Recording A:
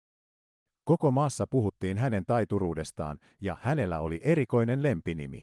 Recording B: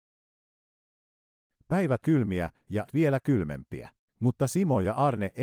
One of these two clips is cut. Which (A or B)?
B